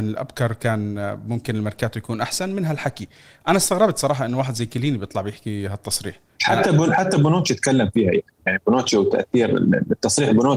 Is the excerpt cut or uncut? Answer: uncut